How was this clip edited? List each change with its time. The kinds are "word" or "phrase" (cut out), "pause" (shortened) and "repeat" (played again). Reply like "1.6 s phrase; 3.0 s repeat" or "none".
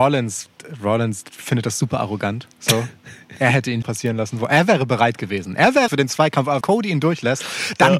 2.5 s pause; 3.8 s word; 5.9 s phrase; 6.6 s word